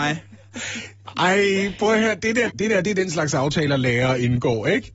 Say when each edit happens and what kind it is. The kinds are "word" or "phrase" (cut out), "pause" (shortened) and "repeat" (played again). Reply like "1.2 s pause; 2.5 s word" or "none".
2.5 s word